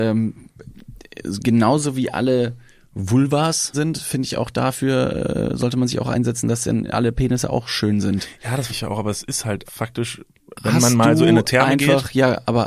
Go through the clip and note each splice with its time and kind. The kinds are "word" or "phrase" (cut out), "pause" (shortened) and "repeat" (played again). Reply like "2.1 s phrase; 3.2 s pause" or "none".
3.7 s word; 8.7 s word; 9.7 s word; 10.5 s word